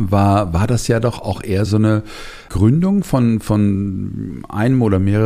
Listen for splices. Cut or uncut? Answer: cut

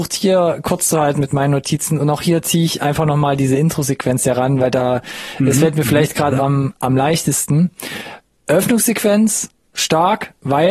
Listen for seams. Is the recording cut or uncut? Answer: uncut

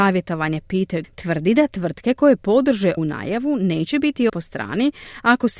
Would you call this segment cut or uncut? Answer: cut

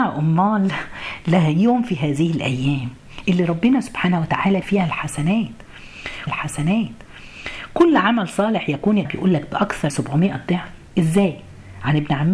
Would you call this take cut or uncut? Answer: cut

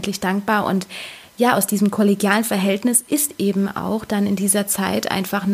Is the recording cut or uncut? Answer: uncut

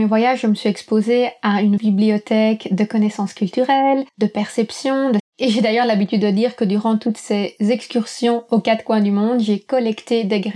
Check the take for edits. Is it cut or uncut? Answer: cut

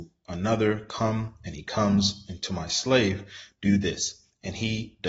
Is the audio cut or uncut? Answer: uncut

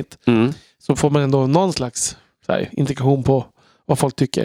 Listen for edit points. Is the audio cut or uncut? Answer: uncut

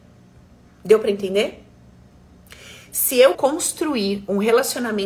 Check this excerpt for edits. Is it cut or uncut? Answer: cut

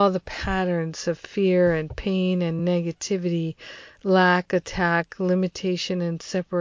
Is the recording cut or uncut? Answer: uncut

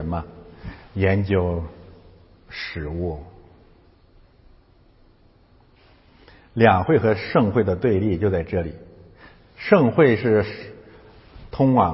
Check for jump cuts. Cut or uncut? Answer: uncut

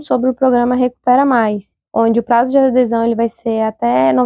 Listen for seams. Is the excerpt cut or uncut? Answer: cut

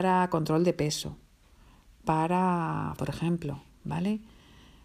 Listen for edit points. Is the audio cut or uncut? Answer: cut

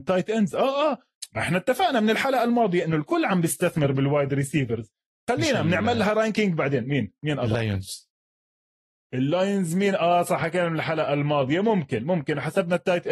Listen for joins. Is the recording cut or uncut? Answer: uncut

